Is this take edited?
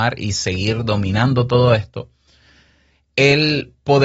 no; 0 cuts

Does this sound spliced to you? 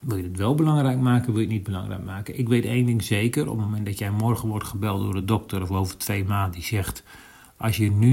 no; 0 cuts

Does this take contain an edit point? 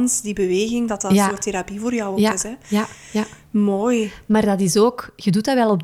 yes; 1 cut; at 3.0 s

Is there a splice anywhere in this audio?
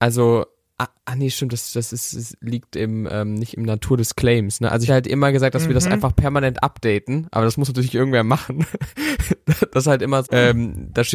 yes; 3 cuts; at 1.0 s, 4.9 s, 10.2 s

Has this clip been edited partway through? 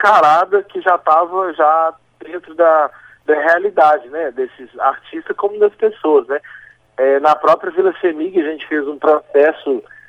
no; 0 cuts

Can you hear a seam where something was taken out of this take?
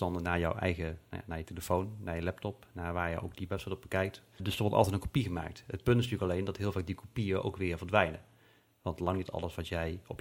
yes; 1 cut; at 4.4 s

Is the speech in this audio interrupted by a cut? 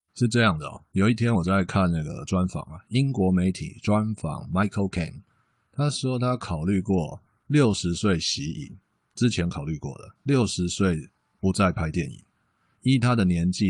no; 0 cuts

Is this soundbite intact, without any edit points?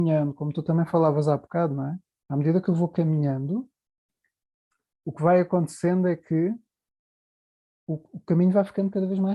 yes; 0 cuts

